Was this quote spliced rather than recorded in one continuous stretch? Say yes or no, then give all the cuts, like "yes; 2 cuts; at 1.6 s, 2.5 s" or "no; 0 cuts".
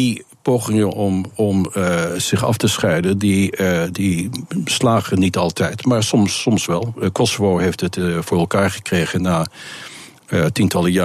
no; 0 cuts